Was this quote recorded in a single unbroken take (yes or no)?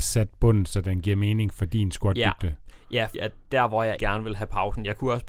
no